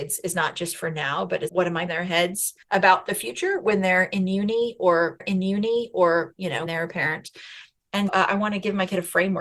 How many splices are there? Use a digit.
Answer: 6